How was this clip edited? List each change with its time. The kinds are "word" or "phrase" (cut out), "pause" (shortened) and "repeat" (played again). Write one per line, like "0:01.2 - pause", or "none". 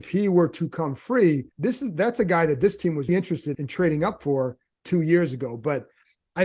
0:01.5 - pause
0:03.1 - word
0:03.5 - word